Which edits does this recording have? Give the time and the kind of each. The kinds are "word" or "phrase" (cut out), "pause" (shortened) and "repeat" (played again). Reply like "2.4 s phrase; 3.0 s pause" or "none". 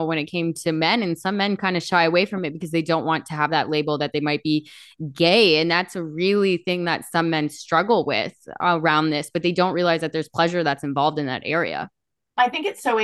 none